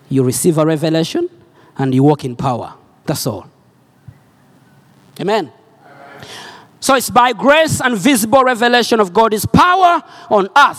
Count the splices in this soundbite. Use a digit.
0